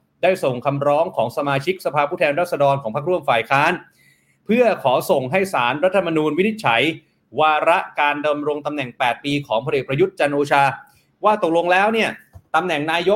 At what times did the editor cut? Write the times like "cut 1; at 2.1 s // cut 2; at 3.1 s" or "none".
none